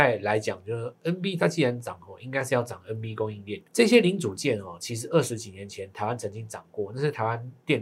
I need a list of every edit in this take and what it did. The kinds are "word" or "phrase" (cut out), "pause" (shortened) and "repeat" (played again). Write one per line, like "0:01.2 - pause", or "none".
0:03.7 - pause